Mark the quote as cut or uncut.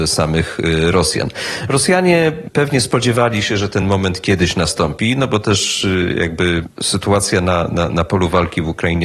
uncut